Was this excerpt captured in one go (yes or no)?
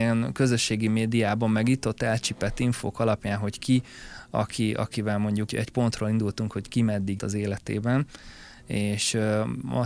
no